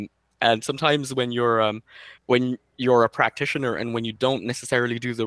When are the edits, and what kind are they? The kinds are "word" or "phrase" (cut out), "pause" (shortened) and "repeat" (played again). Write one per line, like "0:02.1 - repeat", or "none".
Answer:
0:02.2 - pause